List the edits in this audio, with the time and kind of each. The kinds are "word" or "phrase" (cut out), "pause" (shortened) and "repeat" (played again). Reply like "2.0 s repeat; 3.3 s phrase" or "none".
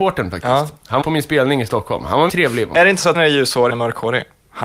1.0 s word; 2.3 s word; 3.1 s word; 3.7 s phrase

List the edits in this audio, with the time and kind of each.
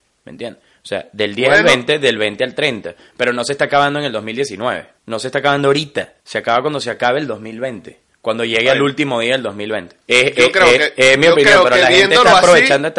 5.0 s pause; 6.2 s pause; 8.1 s pause; 10.0 s pause

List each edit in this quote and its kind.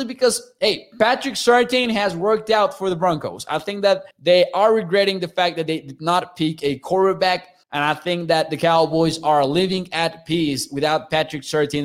4.1 s pause; 7.6 s pause

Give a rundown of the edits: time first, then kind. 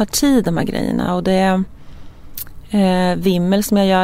none

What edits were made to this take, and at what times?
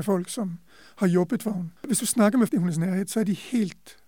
2.5 s phrase

